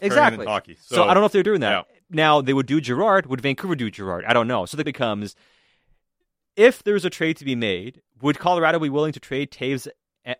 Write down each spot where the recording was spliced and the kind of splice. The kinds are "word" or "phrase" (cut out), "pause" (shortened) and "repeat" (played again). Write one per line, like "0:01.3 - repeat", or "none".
0:04.8 - word